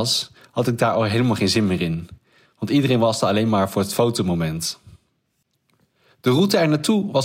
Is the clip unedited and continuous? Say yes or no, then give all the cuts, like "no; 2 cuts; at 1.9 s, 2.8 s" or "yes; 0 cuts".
yes; 0 cuts